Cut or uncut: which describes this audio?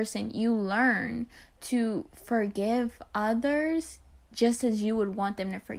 uncut